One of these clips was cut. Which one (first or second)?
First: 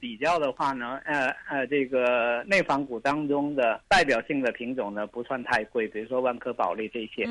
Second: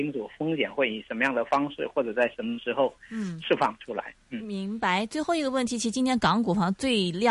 first